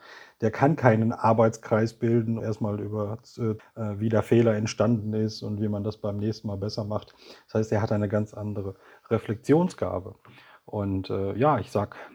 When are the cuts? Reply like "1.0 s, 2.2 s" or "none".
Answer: 2.4 s, 3.6 s

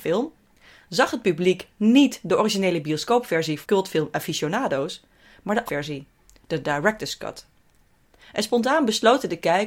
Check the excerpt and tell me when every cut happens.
3.6 s, 5.7 s

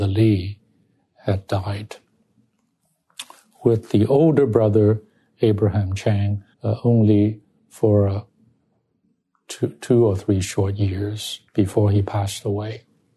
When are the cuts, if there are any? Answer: 6.5 s, 11.5 s

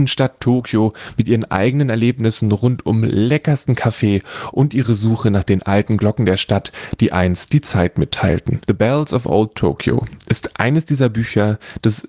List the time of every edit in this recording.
none

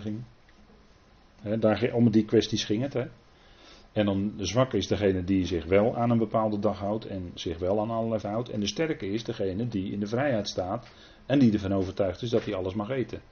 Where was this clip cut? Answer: 8.2 s

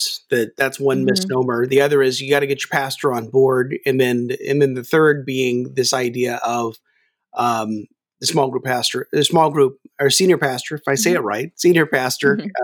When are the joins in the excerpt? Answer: none

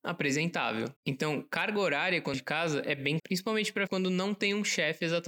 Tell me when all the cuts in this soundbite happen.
1.0 s, 2.3 s, 3.2 s, 3.9 s

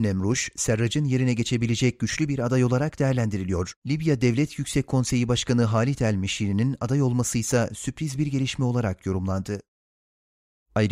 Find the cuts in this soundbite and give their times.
3.8 s

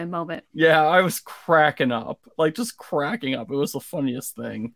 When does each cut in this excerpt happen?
none

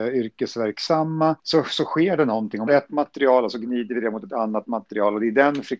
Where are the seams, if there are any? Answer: 1.4 s, 2.7 s

